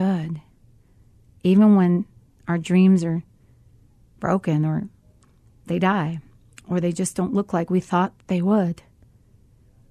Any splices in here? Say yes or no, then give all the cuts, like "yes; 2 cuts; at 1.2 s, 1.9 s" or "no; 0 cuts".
no; 0 cuts